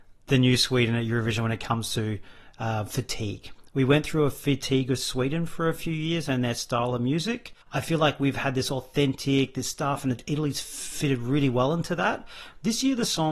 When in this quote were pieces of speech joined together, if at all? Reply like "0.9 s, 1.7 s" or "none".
7.6 s